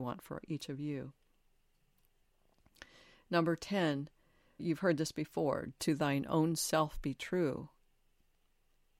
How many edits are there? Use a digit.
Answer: 1